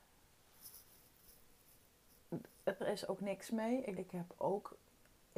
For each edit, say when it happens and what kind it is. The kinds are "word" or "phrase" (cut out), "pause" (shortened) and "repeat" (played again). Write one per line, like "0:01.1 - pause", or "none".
0:02.8 - phrase
0:03.5 - word
0:03.9 - word